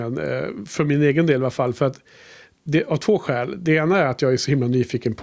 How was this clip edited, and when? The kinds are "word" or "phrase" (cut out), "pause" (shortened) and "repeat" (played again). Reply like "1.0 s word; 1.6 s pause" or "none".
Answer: none